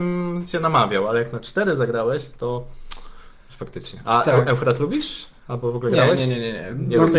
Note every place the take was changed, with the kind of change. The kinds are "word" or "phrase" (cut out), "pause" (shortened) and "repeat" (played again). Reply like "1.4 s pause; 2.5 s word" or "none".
none